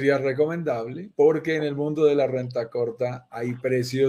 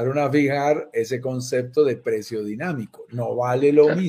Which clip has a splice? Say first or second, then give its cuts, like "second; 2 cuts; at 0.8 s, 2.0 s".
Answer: first; 1 cut; at 1.1 s